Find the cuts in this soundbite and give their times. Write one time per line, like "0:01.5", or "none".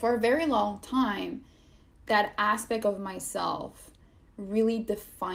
none